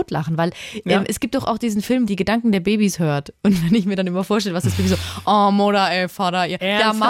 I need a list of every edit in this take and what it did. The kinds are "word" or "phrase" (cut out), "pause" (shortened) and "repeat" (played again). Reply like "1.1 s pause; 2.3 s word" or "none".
2.1 s phrase